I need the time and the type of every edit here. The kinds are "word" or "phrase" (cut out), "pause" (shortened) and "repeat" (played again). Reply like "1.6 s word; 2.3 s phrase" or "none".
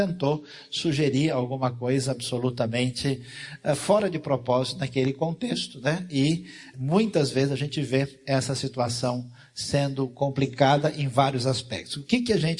6.7 s word